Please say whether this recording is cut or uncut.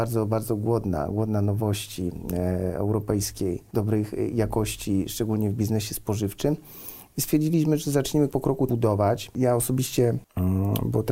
cut